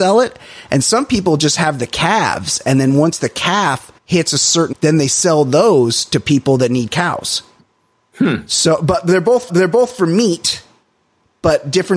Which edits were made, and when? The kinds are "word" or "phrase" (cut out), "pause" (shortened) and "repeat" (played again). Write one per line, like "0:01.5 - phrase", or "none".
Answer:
0:04.0 - pause
0:04.7 - word
0:07.6 - pause
0:09.5 - repeat